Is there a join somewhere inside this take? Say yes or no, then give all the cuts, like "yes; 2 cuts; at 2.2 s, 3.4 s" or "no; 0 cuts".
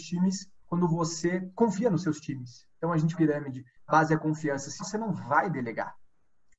yes; 3 cuts; at 3.1 s, 3.9 s, 4.8 s